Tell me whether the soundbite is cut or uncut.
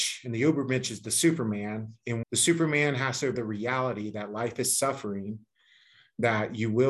cut